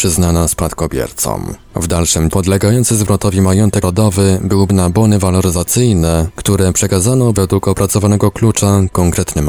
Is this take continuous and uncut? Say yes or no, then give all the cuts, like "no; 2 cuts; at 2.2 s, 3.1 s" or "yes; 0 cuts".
no; 4 cuts; at 2.3 s, 3.8 s, 4.7 s, 7.3 s